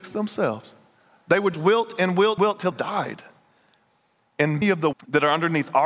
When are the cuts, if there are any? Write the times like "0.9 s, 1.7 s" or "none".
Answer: 1.5 s, 2.4 s, 2.7 s, 4.6 s, 4.9 s